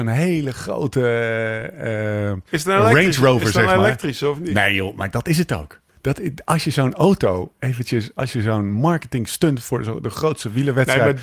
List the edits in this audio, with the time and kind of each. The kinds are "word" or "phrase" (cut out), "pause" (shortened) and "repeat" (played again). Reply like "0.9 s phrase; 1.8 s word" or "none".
2.5 s pause